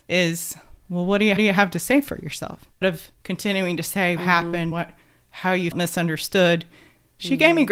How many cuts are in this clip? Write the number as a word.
five